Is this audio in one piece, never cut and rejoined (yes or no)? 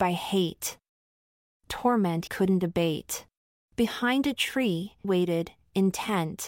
no